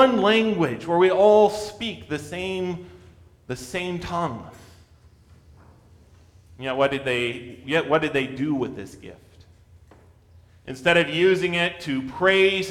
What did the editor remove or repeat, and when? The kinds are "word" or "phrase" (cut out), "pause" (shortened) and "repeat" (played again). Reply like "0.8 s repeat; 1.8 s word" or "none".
none